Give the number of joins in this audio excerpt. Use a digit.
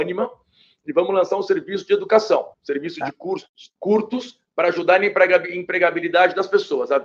2